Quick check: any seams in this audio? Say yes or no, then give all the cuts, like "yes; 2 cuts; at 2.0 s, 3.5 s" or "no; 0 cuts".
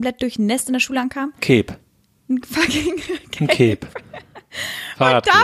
no; 0 cuts